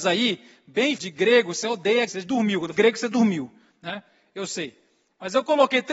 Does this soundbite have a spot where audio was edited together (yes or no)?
yes